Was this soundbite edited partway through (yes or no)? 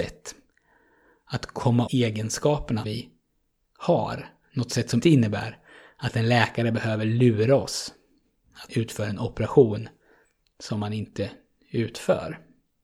yes